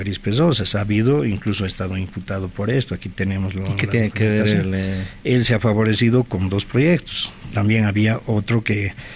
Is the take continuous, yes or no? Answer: yes